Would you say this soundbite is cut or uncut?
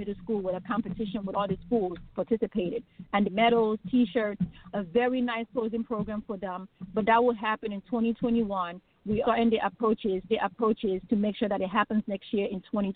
cut